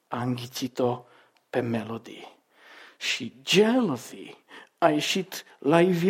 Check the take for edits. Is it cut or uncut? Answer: uncut